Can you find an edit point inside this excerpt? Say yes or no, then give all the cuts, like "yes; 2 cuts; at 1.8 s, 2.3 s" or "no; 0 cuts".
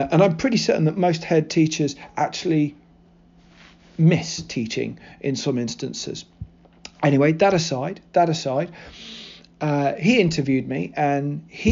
no; 0 cuts